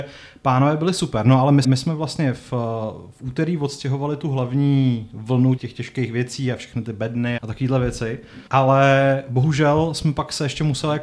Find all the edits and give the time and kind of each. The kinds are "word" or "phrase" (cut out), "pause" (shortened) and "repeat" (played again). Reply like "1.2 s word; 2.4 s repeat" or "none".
1.6 s word; 5.6 s word; 7.4 s word; 8.5 s pause